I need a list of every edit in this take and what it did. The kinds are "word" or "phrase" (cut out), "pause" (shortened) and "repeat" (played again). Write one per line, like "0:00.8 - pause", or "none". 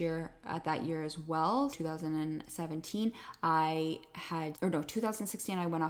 0:01.7 - word
0:04.5 - word